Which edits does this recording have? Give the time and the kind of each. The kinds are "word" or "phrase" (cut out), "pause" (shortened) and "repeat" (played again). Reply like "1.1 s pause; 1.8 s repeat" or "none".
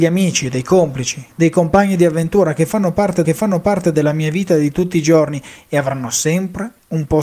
3.2 s repeat

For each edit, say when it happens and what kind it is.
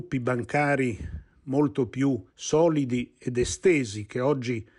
2.3 s pause

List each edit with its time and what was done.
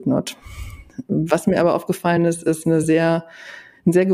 none

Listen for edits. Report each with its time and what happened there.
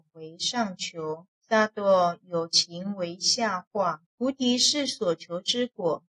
1.4 s pause; 4.1 s pause

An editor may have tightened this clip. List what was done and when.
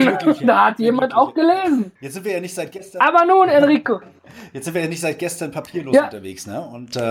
2.0 s pause

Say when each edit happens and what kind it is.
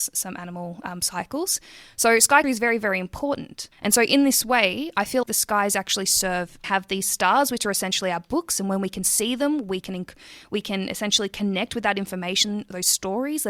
2.4 s word; 3.7 s pause; 5.2 s word; 6.6 s phrase

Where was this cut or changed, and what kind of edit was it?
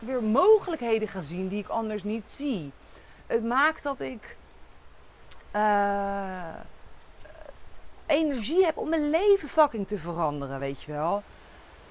none

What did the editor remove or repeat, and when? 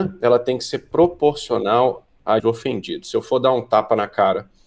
2.4 s word

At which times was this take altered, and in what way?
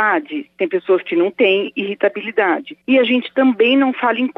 2.8 s pause

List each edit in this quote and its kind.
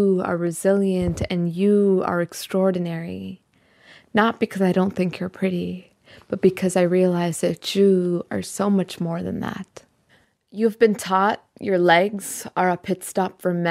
10.1 s pause

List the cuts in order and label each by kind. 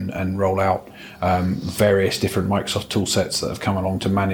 none

